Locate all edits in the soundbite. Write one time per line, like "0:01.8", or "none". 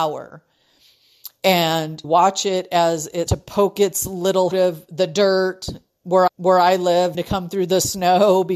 0:02.0
0:03.3
0:04.5
0:06.3
0:07.1